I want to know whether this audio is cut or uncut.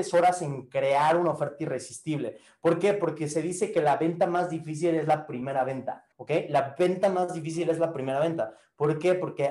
cut